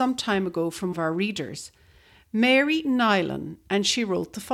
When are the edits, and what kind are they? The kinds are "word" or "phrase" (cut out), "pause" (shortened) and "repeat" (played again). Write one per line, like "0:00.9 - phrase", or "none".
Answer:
0:00.9 - word

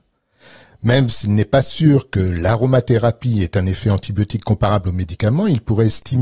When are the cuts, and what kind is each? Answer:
none

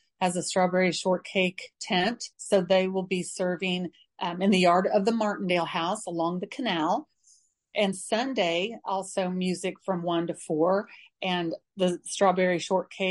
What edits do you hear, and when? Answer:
0:02.3 - pause
0:07.9 - word
0:11.7 - pause

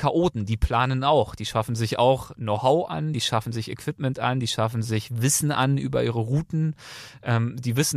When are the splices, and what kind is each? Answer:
none

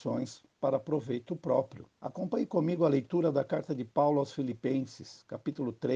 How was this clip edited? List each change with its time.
0:01.9 - pause

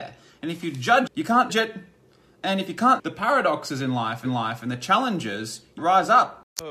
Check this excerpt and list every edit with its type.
0:01.1 - word
0:01.5 - word
0:03.0 - word
0:04.2 - repeat
0:05.8 - word

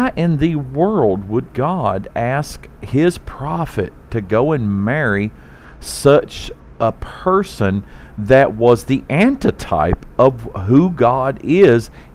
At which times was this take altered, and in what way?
none

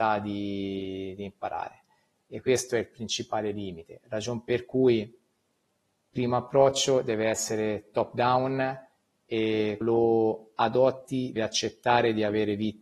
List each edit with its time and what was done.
0:09.8 - word
0:11.4 - word

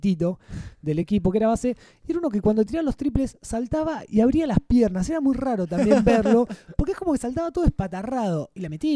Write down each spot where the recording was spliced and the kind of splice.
none

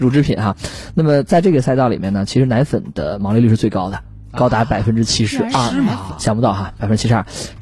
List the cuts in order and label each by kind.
none

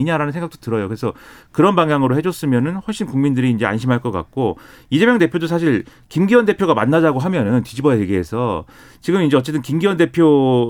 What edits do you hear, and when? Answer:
none

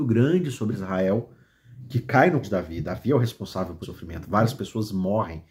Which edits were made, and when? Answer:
0:02.4 - word
0:03.8 - word

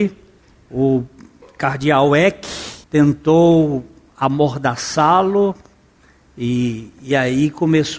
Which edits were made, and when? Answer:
0:02.8 - pause

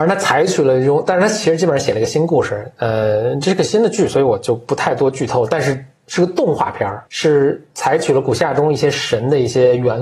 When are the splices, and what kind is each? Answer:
0:07.1 - pause

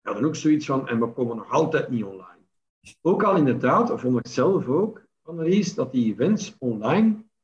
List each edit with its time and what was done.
none

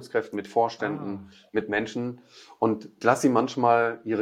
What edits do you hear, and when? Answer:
0:03.0 - word

